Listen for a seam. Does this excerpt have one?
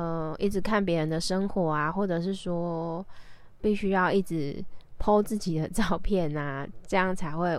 yes; 1 cut; at 3.6 s

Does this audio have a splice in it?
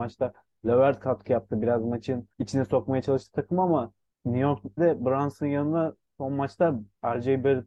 yes; 3 cuts; at 2.3 s, 4.1 s, 4.8 s

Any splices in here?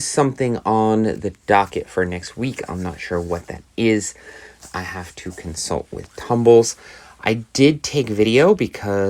no; 0 cuts

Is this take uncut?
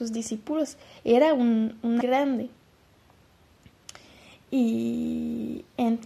no; 1 cut; at 2.0 s

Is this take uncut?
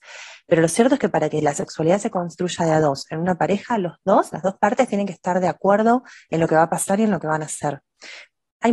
yes; 0 cuts

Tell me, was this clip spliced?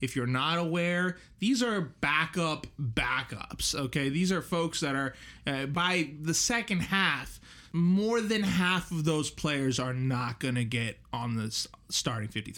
yes; 1 cut; at 7.7 s

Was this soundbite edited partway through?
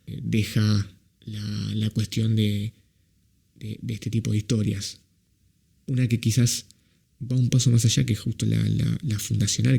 no; 0 cuts

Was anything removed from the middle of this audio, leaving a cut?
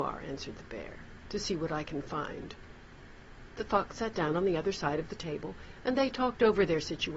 no; 0 cuts

